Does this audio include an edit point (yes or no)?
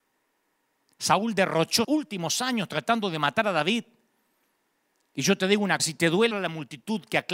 yes